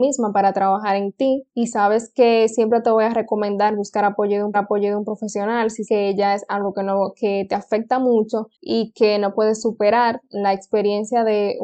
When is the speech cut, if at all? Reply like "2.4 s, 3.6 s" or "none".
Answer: 1.5 s, 4.5 s, 5.9 s, 8.5 s